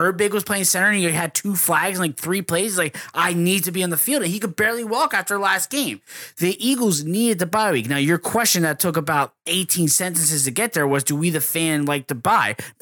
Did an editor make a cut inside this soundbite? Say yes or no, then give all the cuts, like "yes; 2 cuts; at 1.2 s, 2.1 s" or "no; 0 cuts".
no; 0 cuts